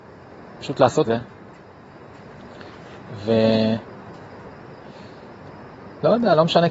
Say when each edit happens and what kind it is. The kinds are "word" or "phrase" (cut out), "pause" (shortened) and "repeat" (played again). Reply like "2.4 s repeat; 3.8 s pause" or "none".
1.1 s word